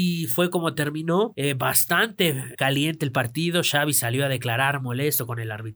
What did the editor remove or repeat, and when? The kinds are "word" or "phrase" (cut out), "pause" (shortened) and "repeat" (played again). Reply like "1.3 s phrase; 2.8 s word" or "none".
4.8 s word

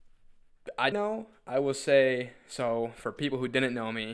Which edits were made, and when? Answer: 0.9 s phrase

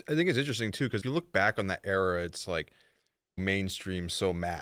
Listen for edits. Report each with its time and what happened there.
1.0 s word; 3.4 s phrase

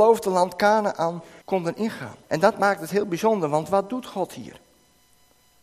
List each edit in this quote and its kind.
1.4 s pause; 2.2 s pause

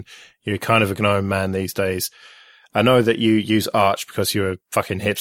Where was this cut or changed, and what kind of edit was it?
none

